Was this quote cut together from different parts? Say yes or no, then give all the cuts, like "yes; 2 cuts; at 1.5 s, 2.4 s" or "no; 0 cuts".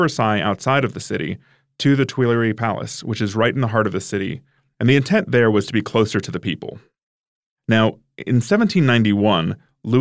no; 0 cuts